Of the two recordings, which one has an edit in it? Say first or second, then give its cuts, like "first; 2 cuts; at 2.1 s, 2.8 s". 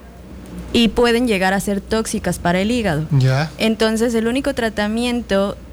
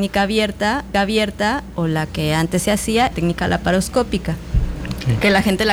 second; 2 cuts; at 0.9 s, 3.1 s